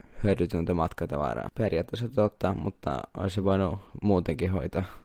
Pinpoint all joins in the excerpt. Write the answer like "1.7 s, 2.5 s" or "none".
none